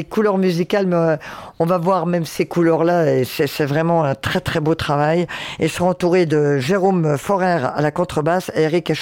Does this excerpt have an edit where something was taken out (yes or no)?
no